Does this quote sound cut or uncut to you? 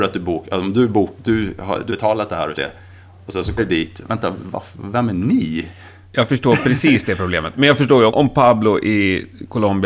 cut